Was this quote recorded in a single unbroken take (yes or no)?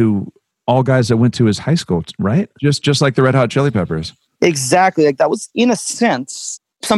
yes